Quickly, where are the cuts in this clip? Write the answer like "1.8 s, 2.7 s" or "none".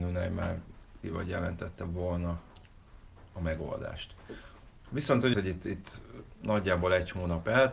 1.0 s, 5.3 s